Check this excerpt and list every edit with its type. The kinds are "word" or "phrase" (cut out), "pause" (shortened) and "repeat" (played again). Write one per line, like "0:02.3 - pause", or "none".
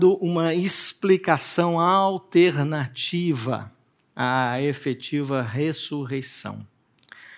none